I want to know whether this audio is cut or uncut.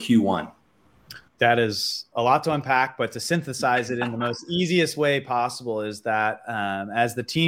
cut